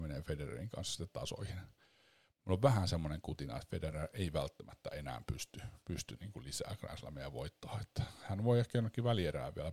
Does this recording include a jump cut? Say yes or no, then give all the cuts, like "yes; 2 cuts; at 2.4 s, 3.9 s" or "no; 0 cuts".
no; 0 cuts